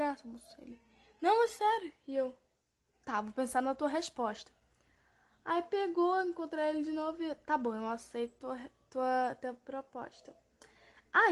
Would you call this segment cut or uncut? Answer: uncut